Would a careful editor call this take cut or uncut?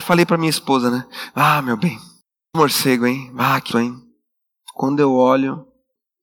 cut